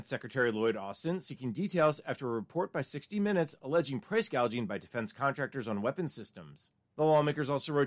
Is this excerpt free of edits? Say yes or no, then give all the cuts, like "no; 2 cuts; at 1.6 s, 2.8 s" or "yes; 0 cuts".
yes; 0 cuts